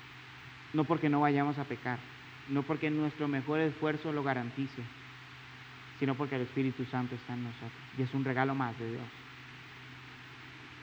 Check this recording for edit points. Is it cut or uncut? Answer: cut